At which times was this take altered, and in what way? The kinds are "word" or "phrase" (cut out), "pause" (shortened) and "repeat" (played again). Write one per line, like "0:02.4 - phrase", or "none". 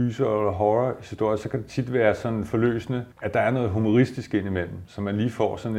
0:03.1 - pause